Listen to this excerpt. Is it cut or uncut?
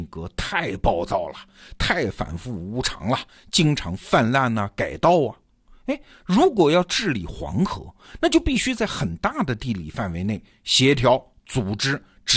uncut